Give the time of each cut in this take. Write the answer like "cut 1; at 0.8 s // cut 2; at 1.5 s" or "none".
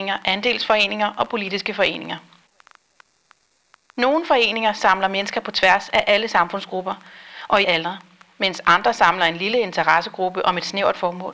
cut 1; at 7.6 s